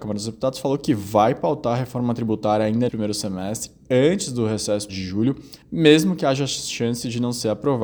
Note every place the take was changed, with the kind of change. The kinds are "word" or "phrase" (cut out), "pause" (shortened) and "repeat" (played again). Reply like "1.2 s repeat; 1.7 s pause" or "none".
2.9 s word; 4.9 s word; 5.6 s pause